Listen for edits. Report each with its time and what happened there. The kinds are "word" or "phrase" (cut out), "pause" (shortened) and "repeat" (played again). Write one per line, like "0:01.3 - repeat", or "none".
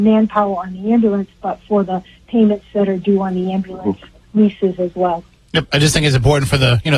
0:05.4 - pause